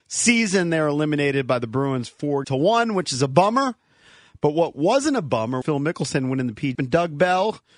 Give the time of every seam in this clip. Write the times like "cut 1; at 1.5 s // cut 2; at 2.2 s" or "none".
cut 1; at 2.4 s // cut 2; at 5.6 s // cut 3; at 6.7 s